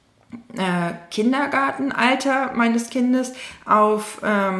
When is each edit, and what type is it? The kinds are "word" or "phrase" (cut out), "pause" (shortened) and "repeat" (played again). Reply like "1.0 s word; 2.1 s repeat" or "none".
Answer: none